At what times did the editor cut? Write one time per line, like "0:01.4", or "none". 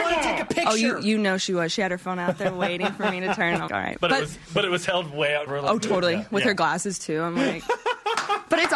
0:03.7
0:05.5